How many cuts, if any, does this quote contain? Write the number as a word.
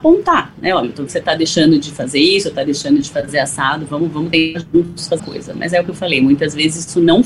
two